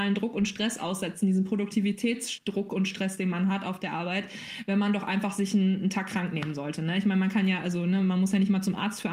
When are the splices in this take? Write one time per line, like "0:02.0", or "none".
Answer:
none